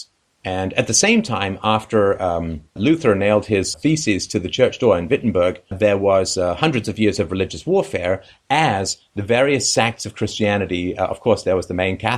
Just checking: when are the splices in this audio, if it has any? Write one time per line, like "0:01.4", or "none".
0:02.8
0:03.7
0:05.7